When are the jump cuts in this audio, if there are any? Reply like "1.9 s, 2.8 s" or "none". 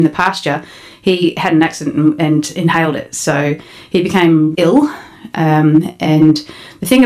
4.5 s